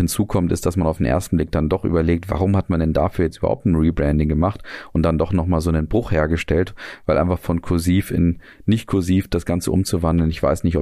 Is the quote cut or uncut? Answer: uncut